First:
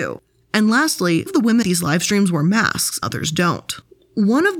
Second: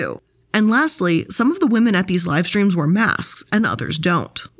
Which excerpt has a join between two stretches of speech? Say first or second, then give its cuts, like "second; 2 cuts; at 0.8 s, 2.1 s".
first; 3 cuts; at 1.3 s, 1.6 s, 3.0 s